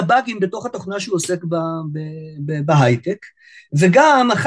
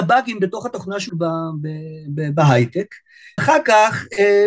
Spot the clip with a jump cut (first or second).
second